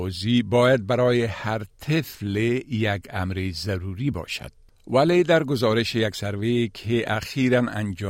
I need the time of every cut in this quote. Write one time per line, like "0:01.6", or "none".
none

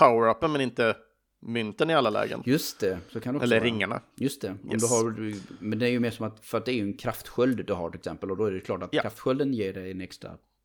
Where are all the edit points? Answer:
none

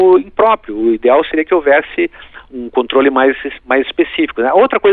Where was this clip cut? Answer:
0:02.5

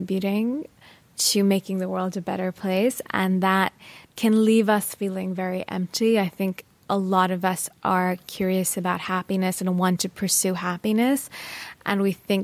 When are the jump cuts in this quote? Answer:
0:04.0

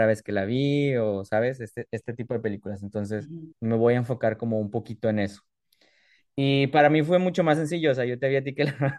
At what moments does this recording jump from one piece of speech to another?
0:03.5

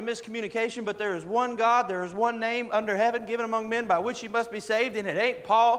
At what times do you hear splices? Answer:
none

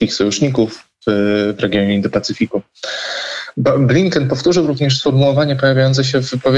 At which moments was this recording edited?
none

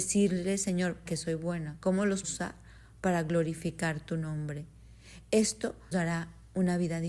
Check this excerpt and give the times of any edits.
0:01.1
0:02.2
0:05.9

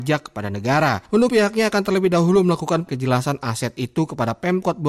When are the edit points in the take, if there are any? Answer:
0:01.3
0:02.9

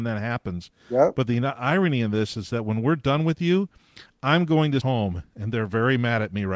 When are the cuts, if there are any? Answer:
0:04.8

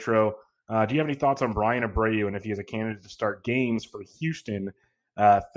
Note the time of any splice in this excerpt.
none

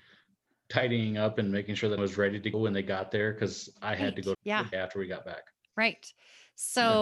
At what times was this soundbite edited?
0:02.0
0:02.5
0:04.3
0:04.7

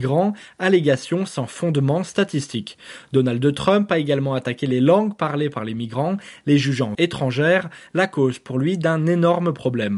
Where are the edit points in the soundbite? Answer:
0:06.9

